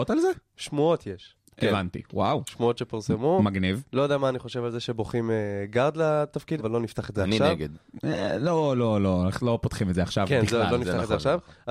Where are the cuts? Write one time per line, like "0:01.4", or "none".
0:06.6